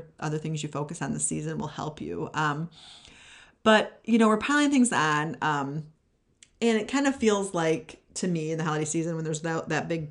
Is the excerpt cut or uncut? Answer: uncut